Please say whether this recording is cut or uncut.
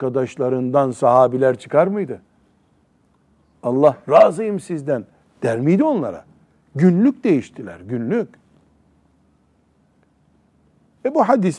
uncut